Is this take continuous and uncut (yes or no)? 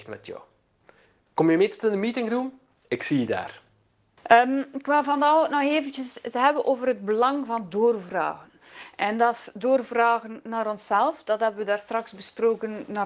yes